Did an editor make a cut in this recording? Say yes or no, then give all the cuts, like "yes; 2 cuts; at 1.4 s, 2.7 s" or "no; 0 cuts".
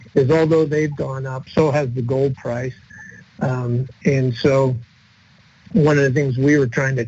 no; 0 cuts